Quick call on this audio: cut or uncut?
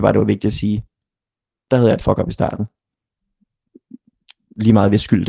cut